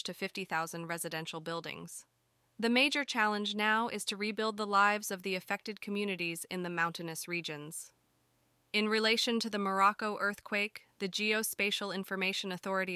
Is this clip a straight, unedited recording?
yes; 0 cuts

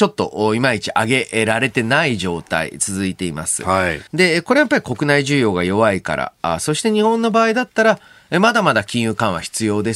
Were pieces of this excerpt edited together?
yes; 1 cut; at 4.1 s

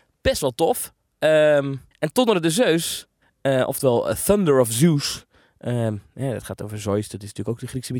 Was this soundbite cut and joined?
yes; 2 cuts; at 1.9 s, 3.2 s

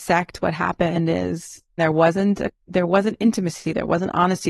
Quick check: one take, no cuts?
no; 1 cut; at 1.8 s

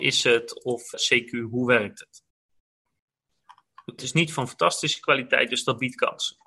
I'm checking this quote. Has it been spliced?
yes; 2 cuts; at 0.9 s, 4.0 s

